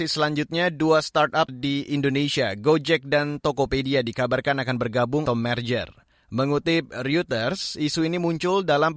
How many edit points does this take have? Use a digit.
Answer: 2